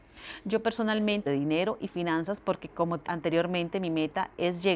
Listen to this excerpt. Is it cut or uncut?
cut